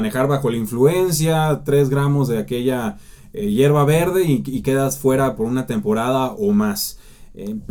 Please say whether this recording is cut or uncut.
uncut